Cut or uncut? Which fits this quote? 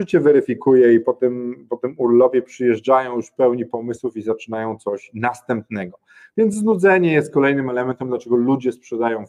uncut